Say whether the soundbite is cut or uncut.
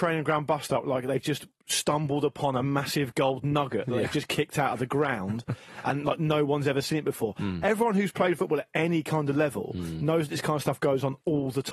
uncut